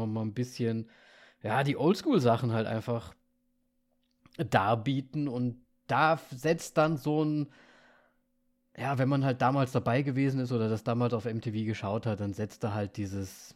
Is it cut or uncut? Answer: cut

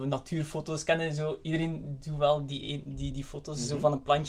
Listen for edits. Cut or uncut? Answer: uncut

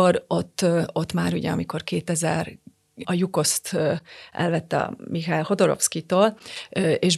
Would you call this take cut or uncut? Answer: cut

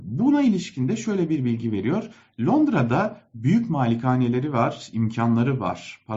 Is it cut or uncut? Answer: uncut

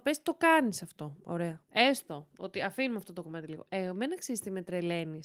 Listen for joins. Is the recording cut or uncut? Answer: cut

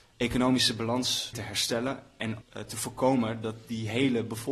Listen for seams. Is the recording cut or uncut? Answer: cut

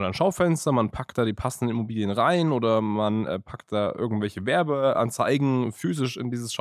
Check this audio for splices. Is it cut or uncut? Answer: uncut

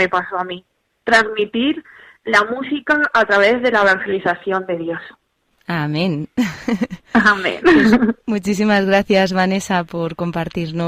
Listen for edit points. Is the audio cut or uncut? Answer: uncut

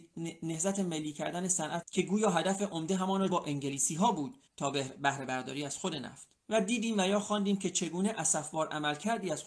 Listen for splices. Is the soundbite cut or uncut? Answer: cut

